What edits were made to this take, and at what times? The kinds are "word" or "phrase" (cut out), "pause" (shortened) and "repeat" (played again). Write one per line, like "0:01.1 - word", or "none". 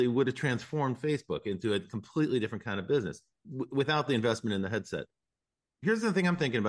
0:03.4 - word